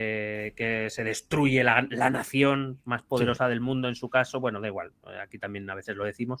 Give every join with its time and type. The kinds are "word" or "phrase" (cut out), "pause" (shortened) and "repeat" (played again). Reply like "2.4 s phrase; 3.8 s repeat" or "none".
none